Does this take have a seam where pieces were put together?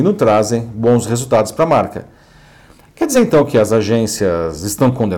no; 0 cuts

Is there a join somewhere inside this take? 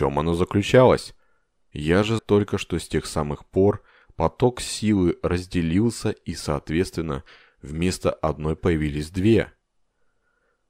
yes; 2 cuts; at 2.2 s, 8.6 s

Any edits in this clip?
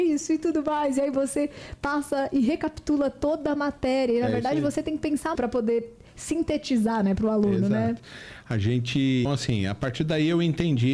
yes; 2 cuts; at 5.4 s, 9.3 s

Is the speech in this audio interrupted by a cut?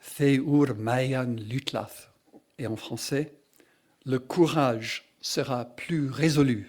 no; 0 cuts

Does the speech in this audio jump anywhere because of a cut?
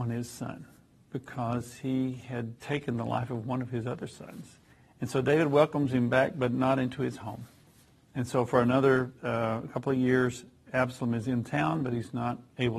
yes; 3 cuts; at 2.6 s, 4.7 s, 9.2 s

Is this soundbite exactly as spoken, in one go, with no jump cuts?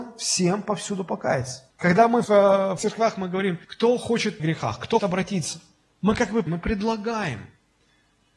no; 8 cuts; at 1.7 s, 2.2 s, 2.8 s, 3.6 s, 4.4 s, 5.0 s, 5.8 s, 6.5 s

